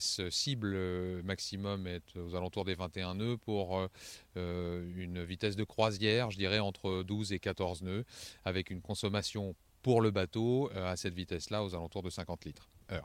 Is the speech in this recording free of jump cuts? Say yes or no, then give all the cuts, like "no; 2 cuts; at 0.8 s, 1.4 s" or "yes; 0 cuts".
yes; 0 cuts